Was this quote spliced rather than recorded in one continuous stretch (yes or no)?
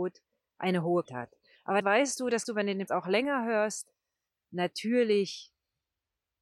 yes